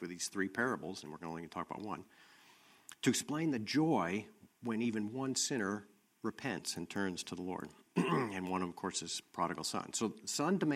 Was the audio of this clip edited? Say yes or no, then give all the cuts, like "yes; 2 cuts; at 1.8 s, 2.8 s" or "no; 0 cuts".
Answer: no; 0 cuts